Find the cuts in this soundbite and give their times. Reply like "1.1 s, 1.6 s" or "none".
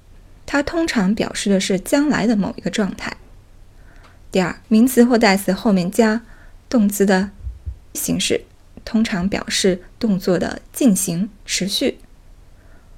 4.6 s, 7.9 s, 11.4 s